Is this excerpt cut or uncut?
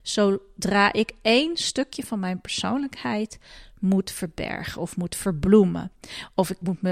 uncut